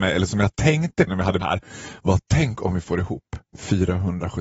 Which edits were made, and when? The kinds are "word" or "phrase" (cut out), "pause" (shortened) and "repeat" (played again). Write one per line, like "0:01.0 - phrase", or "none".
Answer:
0:01.1 - word
0:01.4 - word
0:03.5 - pause